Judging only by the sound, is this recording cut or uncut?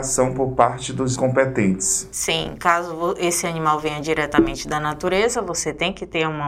cut